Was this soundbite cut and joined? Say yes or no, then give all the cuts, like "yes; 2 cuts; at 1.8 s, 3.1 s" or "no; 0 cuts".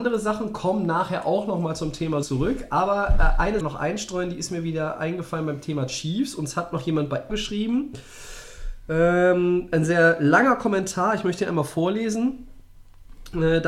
yes; 3 cuts; at 2.2 s, 3.6 s, 7.3 s